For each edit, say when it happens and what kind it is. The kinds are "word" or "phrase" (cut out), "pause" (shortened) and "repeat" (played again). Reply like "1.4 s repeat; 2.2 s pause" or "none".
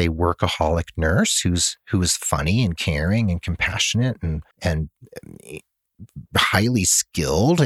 4.5 s pause